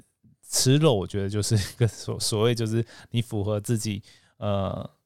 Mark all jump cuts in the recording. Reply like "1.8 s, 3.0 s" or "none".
none